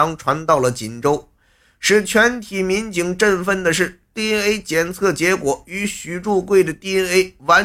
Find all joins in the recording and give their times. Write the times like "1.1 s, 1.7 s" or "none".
none